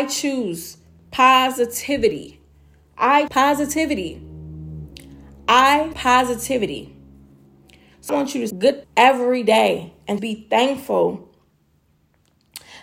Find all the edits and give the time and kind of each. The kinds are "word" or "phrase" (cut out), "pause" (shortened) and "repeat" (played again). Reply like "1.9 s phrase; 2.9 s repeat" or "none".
3.3 s word; 5.9 s word; 8.1 s word; 8.5 s word; 8.8 s word; 10.2 s word